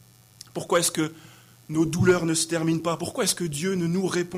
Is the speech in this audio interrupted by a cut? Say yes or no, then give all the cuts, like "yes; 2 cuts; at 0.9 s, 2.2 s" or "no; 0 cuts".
no; 0 cuts